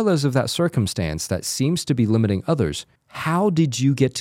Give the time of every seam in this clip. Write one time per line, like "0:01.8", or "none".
0:03.0